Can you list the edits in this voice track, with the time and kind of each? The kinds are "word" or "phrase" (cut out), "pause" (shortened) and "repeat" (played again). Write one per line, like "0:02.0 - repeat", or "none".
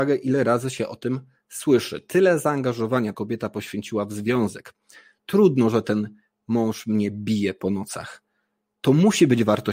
0:03.1 - word

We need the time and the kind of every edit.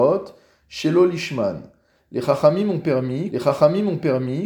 0:03.3 - repeat

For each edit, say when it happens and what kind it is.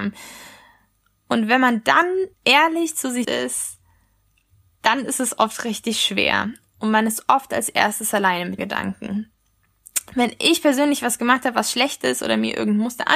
0:02.3 - pause
0:03.2 - word
0:08.6 - word

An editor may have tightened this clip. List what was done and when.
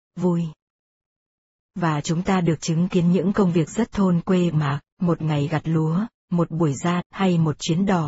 0:04.5 - phrase
0:04.9 - pause
0:07.0 - word

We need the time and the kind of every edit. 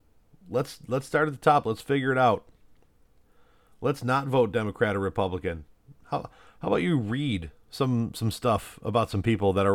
none

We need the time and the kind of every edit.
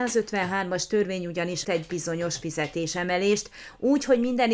0:01.6 - word

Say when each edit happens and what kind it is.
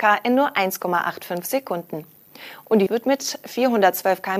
0:02.9 - word

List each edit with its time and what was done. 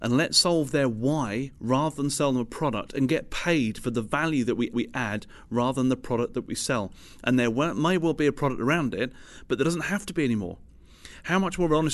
0:04.7 - repeat

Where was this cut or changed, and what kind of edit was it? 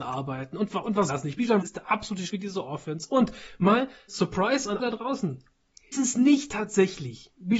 0:01.1 - word
0:01.6 - word
0:02.3 - word
0:04.1 - word
0:04.8 - word
0:05.9 - word

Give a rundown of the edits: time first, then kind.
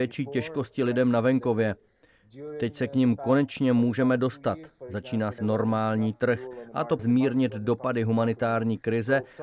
0:05.4 - word
0:07.0 - word

